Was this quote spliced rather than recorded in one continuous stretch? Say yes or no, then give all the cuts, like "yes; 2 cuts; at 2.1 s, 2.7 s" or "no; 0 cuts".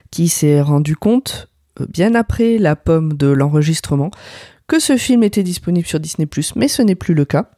no; 0 cuts